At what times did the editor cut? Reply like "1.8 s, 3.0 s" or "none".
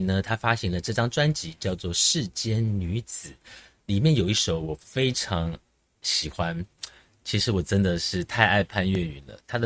none